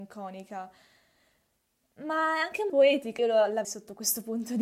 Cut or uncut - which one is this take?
cut